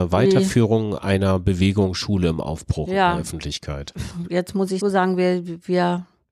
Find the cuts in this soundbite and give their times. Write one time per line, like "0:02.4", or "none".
0:04.8